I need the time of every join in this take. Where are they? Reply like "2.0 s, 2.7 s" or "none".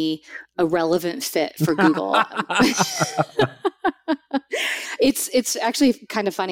none